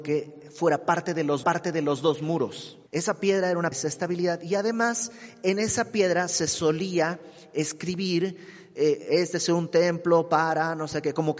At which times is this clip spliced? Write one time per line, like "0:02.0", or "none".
0:01.4
0:02.9
0:03.7